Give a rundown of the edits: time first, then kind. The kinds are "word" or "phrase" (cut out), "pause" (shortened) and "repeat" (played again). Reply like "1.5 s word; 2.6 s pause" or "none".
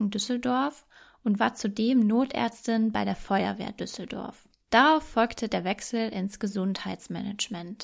none

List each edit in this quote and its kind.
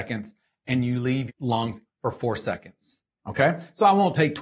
1.3 s word; 1.9 s word

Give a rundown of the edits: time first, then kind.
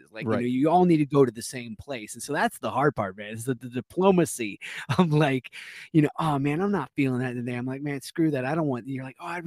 3.6 s word

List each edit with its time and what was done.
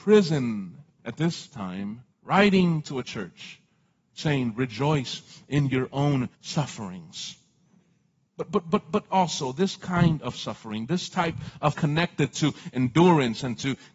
2.1 s pause; 6.3 s pause; 11.7 s phrase

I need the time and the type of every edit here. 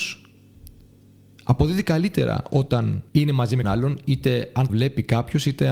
3.1 s pause; 3.6 s word; 4.7 s word

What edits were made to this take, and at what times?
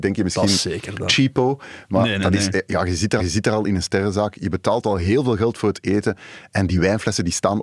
3.2 s repeat

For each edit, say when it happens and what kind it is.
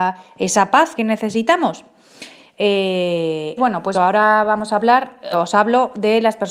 1.0 s word; 3.6 s word; 3.9 s word; 5.3 s word

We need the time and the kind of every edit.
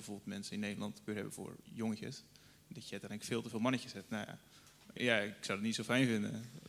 1.1 s word; 5.0 s word

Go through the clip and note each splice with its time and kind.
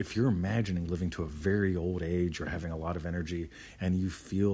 none

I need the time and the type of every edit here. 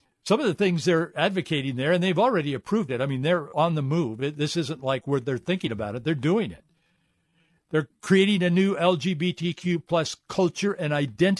none

